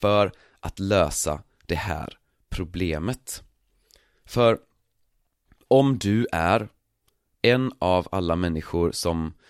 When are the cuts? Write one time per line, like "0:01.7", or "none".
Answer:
none